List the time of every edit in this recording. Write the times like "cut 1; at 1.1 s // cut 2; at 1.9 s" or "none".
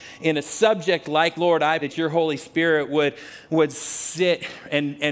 cut 1; at 1.3 s // cut 2; at 1.8 s

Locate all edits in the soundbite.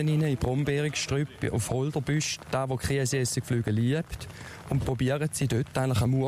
none

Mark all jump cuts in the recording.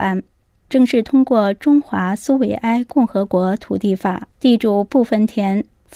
cut 1; at 4.3 s

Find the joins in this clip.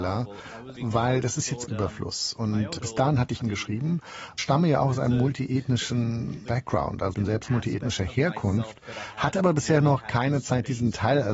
cut 1; at 1.7 s // cut 2; at 3.4 s // cut 3; at 4.4 s // cut 4; at 7.1 s

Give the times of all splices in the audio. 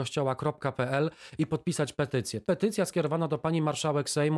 cut 1; at 2.5 s

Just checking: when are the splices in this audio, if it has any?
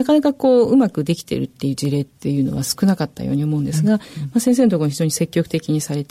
none

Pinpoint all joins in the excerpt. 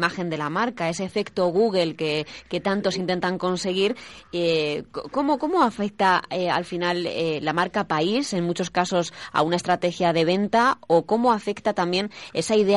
none

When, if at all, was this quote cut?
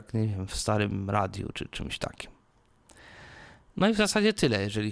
cut 1; at 1.5 s

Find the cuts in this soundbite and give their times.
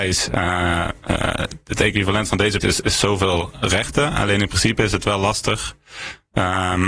cut 1; at 2.6 s

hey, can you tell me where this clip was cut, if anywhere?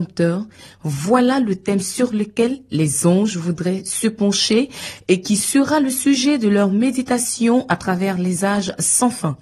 none

